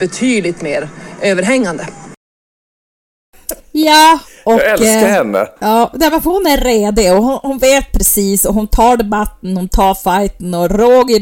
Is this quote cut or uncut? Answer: cut